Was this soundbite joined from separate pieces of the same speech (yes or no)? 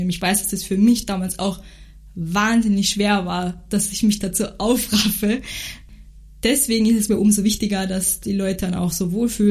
yes